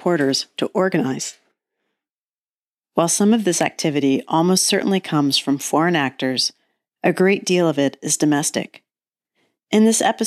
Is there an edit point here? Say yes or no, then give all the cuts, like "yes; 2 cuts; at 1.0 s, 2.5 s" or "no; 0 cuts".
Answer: no; 0 cuts